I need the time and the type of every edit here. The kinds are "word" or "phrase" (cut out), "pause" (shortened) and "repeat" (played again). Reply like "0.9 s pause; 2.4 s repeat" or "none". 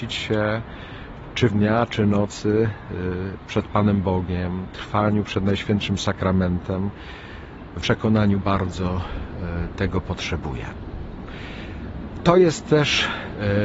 1.5 s phrase; 3.5 s phrase; 7.8 s word; 8.4 s word